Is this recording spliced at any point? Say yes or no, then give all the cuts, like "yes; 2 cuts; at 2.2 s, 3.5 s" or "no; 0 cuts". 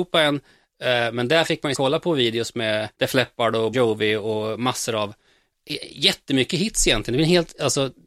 yes; 3 cuts; at 1.7 s, 2.9 s, 3.7 s